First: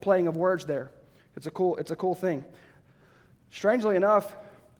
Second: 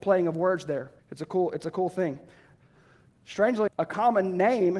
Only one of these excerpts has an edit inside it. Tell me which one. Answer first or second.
second